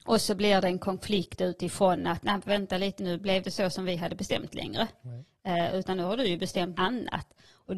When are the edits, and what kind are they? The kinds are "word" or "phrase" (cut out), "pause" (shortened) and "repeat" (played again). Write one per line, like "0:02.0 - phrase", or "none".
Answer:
0:03.0 - word
0:03.4 - word
0:06.8 - word